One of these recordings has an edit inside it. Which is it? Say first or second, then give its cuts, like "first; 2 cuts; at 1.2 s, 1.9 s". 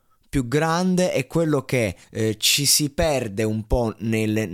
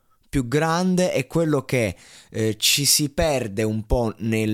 first; 1 cut; at 2.0 s